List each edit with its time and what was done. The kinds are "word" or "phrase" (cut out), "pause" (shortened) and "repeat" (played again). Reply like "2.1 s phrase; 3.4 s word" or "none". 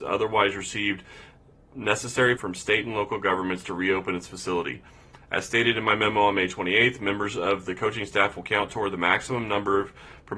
2.4 s word